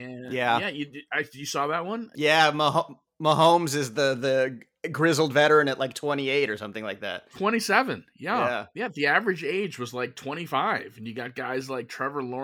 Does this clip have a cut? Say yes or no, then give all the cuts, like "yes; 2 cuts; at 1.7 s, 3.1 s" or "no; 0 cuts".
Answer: no; 0 cuts